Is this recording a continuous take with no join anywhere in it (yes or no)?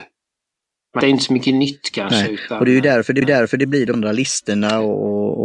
no